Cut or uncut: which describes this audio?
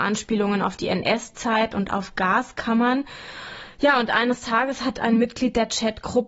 uncut